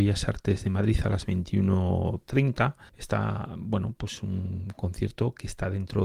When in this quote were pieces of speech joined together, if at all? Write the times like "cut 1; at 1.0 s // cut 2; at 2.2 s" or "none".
cut 1; at 2.9 s